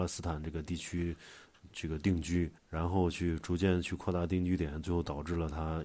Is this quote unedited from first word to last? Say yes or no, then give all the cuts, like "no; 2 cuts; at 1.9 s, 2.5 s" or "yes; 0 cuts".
no; 1 cut; at 2.6 s